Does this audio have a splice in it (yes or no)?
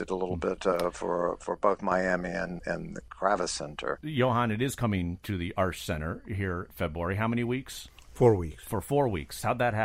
yes